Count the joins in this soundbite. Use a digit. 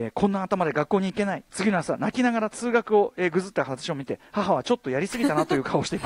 1